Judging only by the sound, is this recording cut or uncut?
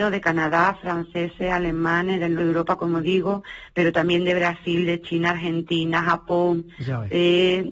cut